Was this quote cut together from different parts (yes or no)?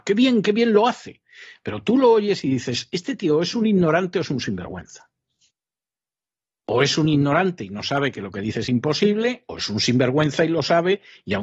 no